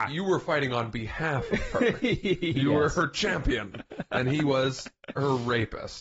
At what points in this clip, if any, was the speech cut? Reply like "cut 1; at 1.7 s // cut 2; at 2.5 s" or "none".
none